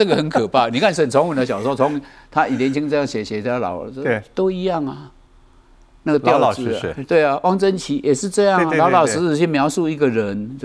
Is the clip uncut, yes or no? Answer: yes